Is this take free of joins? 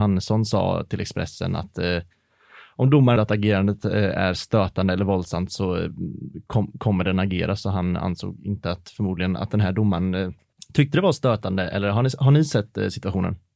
no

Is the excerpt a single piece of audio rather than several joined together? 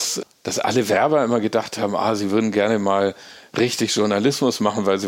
yes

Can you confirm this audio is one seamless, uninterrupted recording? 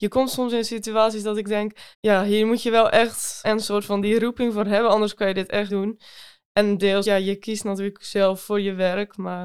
no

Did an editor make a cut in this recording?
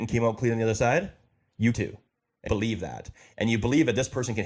yes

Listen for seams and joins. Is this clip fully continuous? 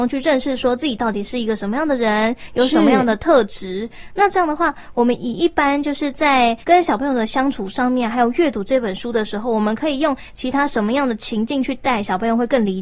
no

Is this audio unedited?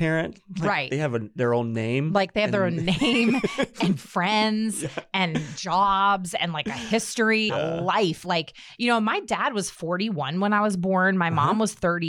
no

